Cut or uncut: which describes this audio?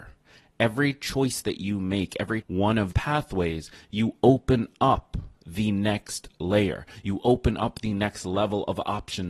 cut